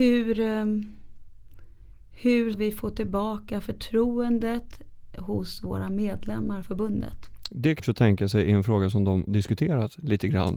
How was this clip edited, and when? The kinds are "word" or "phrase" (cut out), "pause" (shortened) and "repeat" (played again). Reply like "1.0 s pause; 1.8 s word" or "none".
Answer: 2.5 s word; 6.6 s word; 7.8 s phrase; 9.3 s word

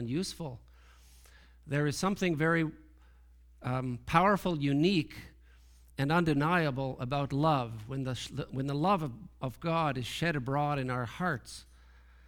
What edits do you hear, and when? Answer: none

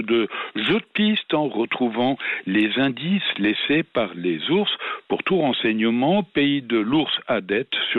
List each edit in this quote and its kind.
none

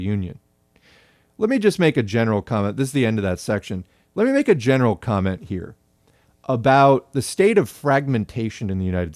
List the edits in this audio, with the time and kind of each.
none

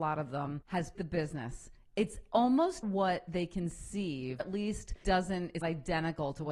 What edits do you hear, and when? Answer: 0.9 s word; 2.8 s word; 4.4 s word; 5.0 s word; 5.6 s word

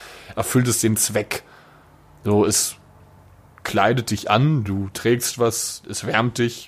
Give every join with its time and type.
none

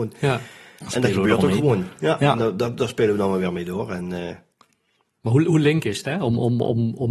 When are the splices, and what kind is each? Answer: none

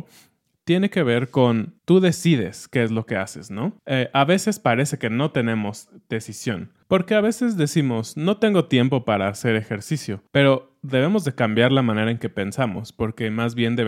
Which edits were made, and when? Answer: 1.8 s pause; 3.8 s pause; 10.3 s pause

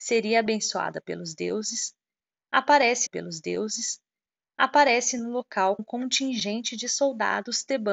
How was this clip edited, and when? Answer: 3.1 s repeat; 5.8 s word

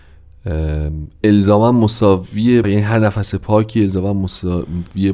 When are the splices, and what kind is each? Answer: 2.6 s word

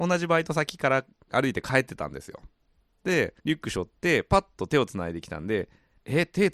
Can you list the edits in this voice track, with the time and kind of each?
3.4 s pause

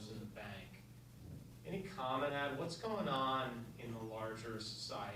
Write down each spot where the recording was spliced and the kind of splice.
2.3 s word

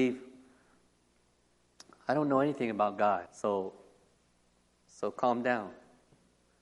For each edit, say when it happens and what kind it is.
3.3 s pause

